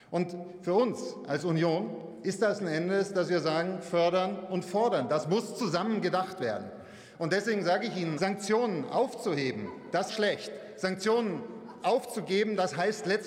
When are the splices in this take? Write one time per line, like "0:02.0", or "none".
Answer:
0:02.6
0:08.2
0:10.1